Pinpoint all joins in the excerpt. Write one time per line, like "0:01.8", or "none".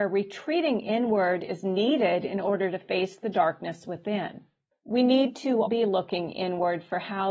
0:04.7
0:05.7